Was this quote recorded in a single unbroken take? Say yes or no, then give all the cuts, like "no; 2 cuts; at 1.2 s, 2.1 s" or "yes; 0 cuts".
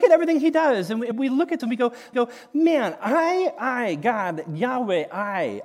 no; 3 cuts; at 1.1 s, 1.6 s, 2.1 s